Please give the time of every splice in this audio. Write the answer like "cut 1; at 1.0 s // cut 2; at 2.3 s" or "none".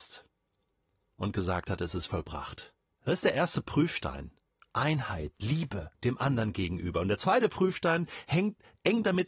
cut 1; at 5.9 s